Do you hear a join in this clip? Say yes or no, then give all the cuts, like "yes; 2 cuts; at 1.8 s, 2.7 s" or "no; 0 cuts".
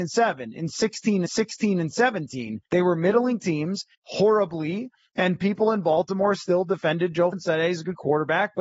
yes; 4 cuts; at 1.3 s, 2.7 s, 3.9 s, 7.3 s